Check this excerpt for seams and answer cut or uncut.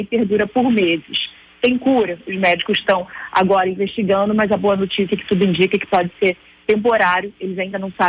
uncut